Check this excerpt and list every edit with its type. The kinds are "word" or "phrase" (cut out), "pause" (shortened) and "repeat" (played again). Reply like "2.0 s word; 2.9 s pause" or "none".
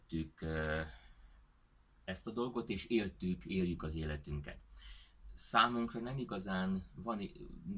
none